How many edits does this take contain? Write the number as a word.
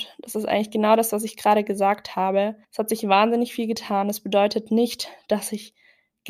one